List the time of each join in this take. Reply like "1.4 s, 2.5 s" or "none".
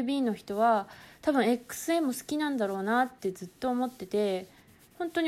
none